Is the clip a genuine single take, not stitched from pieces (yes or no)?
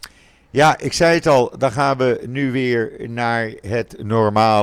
yes